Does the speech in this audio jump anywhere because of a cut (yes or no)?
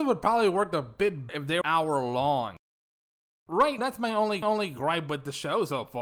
yes